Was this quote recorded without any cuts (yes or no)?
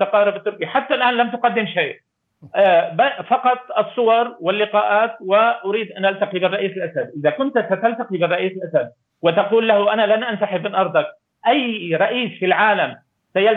yes